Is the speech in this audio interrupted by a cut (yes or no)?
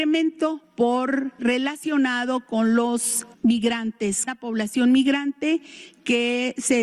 yes